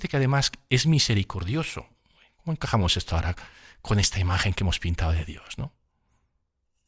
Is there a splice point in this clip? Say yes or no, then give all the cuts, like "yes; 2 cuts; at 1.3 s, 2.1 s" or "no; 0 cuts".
no; 0 cuts